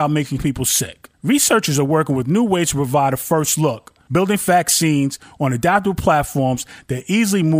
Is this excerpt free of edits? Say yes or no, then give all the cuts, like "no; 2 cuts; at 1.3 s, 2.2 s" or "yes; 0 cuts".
no; 1 cut; at 1.1 s